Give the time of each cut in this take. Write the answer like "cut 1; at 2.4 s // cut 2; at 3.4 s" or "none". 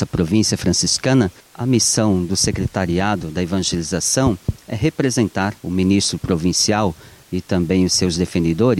cut 1; at 5.6 s